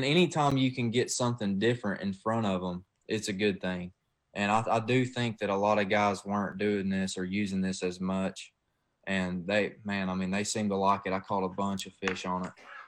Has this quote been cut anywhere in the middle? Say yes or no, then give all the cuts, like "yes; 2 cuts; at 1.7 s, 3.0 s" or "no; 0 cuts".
no; 0 cuts